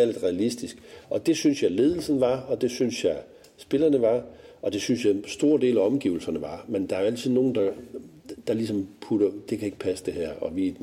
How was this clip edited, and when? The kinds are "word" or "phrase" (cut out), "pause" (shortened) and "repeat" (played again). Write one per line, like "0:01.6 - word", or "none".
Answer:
none